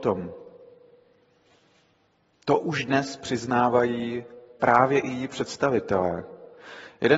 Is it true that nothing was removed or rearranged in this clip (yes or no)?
yes